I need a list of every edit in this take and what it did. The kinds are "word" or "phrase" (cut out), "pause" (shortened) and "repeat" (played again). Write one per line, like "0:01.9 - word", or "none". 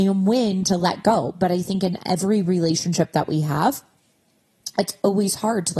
none